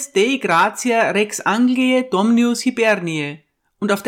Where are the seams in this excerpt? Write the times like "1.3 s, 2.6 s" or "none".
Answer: none